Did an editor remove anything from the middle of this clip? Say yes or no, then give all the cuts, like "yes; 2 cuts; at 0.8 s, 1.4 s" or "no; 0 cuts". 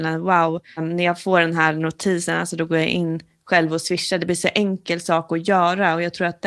no; 0 cuts